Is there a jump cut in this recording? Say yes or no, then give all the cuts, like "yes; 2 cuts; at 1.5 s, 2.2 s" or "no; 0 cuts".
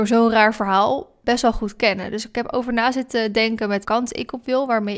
yes; 1 cut; at 3.8 s